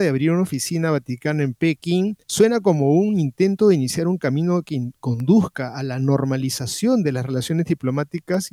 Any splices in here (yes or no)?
yes